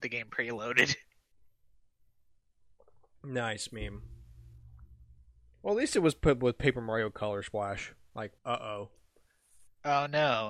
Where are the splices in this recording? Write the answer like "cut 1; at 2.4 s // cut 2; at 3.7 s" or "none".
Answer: cut 1; at 8.4 s